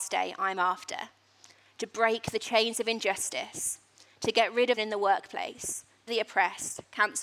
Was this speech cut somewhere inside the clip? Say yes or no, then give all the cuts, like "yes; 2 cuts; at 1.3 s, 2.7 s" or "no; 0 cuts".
yes; 2 cuts; at 4.8 s, 6.1 s